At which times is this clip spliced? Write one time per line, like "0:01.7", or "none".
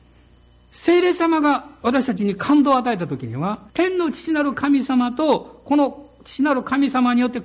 0:03.7